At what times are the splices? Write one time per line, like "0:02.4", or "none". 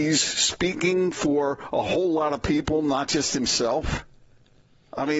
none